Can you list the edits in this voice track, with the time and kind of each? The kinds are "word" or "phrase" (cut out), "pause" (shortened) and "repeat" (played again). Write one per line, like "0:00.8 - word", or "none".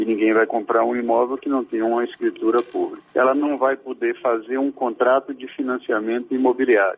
0:03.1 - pause